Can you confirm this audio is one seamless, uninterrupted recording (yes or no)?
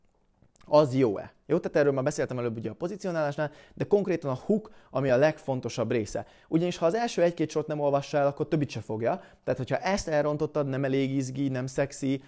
yes